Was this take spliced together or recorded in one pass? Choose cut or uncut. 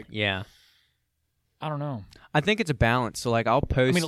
uncut